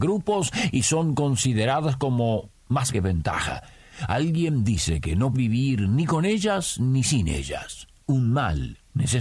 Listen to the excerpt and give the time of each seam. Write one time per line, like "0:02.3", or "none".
0:02.9
0:05.3